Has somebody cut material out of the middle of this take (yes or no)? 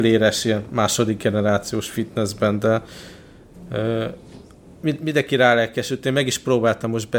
no